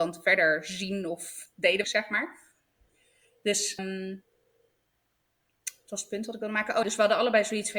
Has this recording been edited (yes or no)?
yes